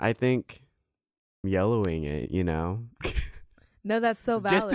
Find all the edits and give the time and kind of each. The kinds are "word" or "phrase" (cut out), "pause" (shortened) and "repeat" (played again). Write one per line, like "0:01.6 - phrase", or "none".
0:01.4 - phrase